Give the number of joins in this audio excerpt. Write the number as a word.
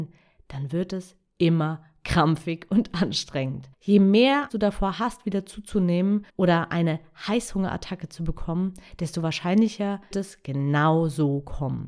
four